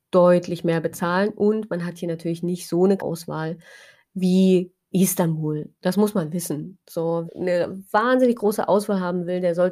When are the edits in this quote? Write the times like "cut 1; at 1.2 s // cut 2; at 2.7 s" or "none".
cut 1; at 3.0 s // cut 2; at 4.9 s // cut 3; at 7.3 s